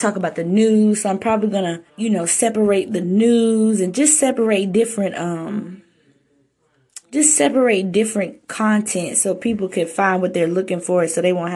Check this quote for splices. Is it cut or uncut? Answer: cut